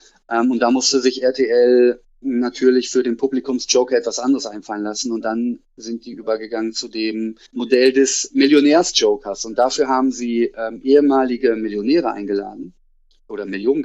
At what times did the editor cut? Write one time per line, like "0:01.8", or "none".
0:07.5

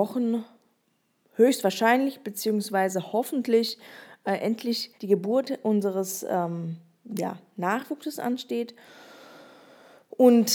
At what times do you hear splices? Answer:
0:04.9

